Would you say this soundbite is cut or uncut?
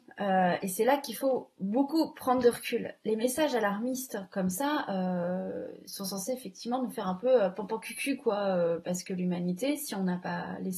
uncut